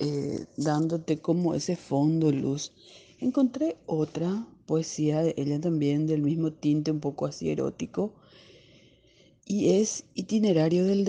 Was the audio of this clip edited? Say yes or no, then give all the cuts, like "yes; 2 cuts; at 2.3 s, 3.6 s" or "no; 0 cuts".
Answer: no; 0 cuts